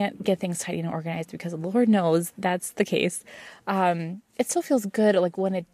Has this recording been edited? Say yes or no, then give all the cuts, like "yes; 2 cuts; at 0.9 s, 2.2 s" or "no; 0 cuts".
no; 0 cuts